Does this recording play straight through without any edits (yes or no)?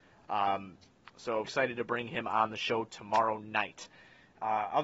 no